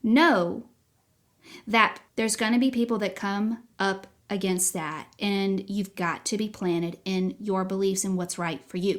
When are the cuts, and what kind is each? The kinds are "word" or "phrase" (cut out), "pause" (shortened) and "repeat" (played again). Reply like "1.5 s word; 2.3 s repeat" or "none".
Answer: 2.1 s pause; 3.7 s pause